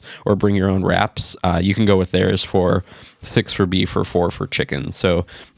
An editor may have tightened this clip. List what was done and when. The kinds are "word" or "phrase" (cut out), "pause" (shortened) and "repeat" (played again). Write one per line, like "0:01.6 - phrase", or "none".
none